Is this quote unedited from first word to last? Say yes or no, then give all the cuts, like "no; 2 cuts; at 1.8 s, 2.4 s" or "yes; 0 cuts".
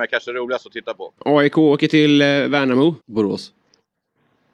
no; 2 cuts; at 1.2 s, 3.0 s